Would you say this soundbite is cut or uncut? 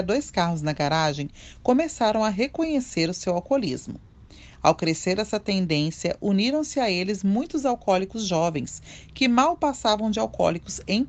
uncut